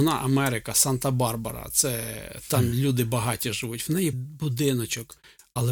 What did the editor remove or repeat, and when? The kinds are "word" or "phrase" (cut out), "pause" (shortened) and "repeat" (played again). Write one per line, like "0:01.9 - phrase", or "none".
0:04.1 - word